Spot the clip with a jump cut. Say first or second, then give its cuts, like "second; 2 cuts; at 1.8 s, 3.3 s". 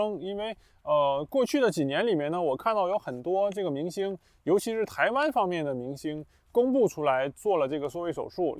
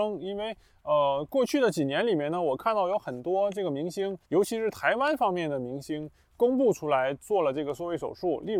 second; 1 cut; at 4.2 s